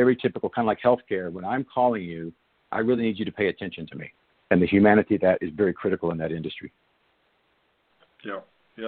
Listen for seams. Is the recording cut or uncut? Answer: uncut